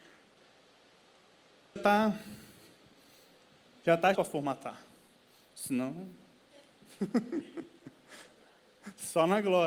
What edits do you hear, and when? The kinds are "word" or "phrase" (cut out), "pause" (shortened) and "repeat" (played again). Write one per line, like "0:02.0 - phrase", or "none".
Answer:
0:01.8 - phrase
0:04.1 - phrase